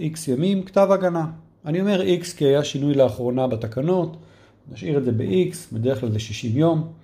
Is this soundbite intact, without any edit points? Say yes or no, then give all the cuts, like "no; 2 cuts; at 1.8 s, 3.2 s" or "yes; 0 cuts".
yes; 0 cuts